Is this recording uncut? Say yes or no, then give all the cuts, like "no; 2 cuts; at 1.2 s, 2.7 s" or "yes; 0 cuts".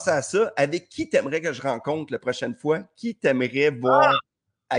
yes; 0 cuts